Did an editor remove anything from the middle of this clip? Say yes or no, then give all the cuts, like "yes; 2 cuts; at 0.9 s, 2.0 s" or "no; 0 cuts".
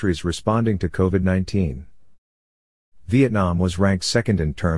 no; 0 cuts